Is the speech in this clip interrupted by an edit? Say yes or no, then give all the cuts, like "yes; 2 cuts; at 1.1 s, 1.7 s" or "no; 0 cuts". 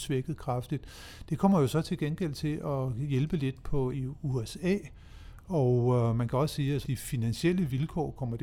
yes; 2 cuts; at 3.9 s, 6.8 s